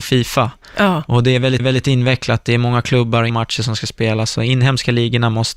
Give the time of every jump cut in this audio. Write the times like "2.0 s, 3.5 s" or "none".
1.6 s, 3.3 s